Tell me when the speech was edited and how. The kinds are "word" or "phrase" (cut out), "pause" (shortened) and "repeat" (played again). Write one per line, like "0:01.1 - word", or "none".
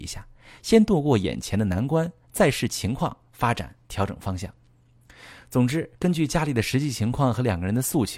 0:05.9 - pause